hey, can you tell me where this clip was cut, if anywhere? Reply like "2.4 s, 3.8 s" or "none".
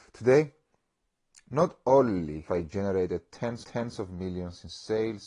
2.5 s, 3.6 s